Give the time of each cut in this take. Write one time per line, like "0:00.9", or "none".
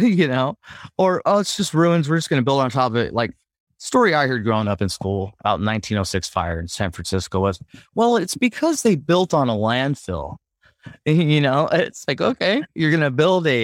none